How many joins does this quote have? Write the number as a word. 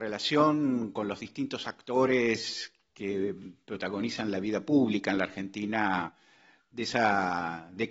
zero